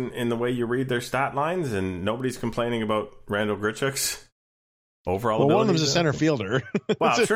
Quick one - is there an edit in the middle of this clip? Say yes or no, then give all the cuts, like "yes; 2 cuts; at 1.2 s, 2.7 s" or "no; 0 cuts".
no; 0 cuts